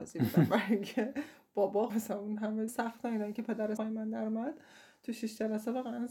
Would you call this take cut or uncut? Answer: cut